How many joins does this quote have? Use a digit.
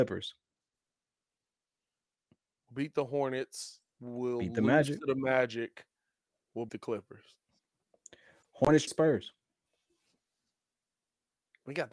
2